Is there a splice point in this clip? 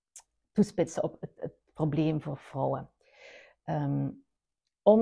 no; 0 cuts

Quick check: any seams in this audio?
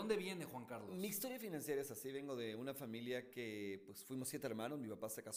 no; 0 cuts

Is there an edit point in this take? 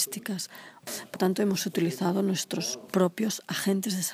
yes; 1 cut; at 1.1 s

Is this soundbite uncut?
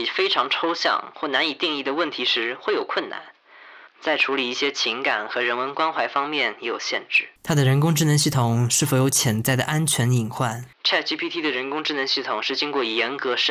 no; 3 cuts; at 3.9 s, 7.4 s, 10.7 s

